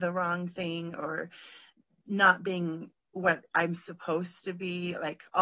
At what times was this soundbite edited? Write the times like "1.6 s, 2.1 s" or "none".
none